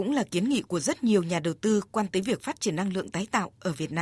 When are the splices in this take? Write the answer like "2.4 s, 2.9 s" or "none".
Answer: 2.1 s